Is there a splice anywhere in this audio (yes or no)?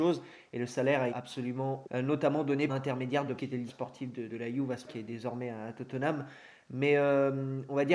yes